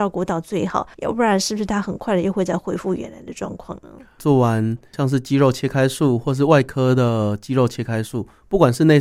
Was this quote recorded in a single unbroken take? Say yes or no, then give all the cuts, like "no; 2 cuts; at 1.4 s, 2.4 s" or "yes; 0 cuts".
no; 1 cut; at 0.9 s